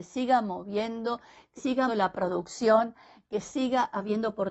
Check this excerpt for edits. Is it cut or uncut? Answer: cut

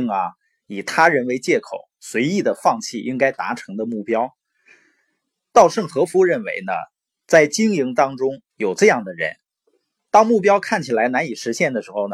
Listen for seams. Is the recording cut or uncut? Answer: cut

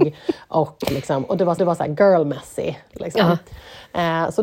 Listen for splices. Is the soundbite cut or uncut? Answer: cut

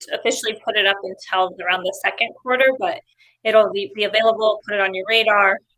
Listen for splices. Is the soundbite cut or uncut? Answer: uncut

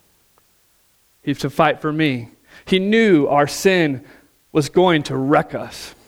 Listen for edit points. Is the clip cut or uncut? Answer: uncut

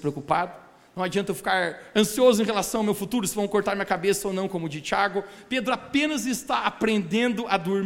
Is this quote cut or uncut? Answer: uncut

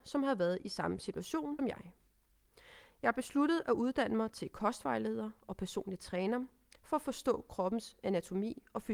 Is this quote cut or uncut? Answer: cut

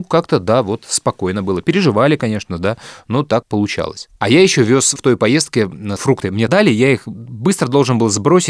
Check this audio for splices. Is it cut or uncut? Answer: cut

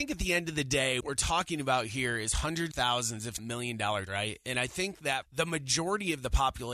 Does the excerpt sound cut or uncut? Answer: cut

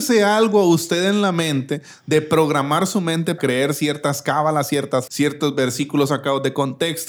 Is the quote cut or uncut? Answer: cut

